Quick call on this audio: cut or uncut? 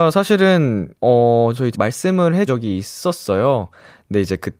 cut